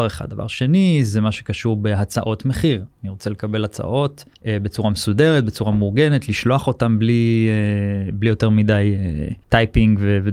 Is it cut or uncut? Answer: cut